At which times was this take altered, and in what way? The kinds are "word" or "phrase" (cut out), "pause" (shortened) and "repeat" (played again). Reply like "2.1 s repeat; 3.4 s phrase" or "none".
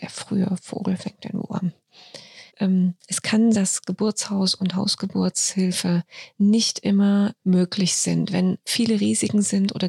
2.5 s pause; 3.5 s word; 7.4 s word